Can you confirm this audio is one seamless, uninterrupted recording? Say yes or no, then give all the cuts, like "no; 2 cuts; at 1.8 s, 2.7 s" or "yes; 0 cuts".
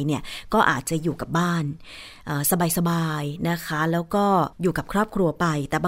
no; 1 cut; at 4.5 s